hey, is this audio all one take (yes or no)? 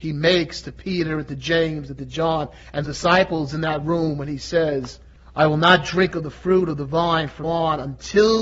no